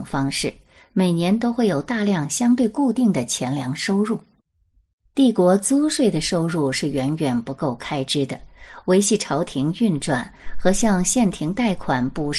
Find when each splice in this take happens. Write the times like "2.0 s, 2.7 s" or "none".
none